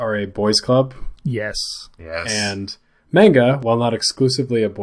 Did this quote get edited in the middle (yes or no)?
no